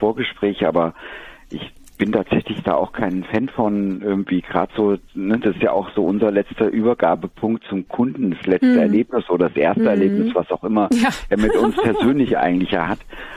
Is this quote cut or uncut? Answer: uncut